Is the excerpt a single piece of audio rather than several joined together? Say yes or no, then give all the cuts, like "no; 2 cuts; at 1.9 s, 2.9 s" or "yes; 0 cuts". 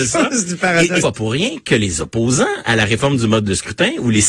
no; 1 cut; at 1.0 s